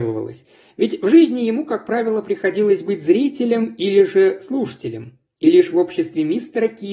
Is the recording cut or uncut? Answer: uncut